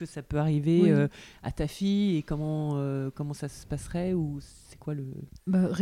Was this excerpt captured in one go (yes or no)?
yes